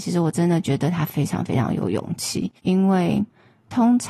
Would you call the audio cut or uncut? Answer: cut